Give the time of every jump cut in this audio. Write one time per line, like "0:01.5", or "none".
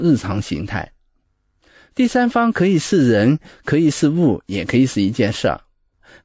none